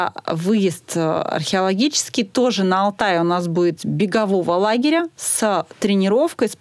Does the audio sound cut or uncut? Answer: cut